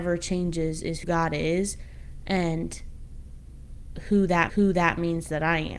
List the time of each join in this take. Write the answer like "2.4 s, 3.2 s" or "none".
1.0 s, 4.5 s